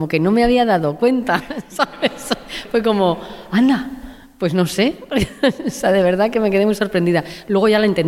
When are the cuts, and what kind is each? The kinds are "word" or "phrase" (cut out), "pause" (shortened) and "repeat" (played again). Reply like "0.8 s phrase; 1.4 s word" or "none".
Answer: none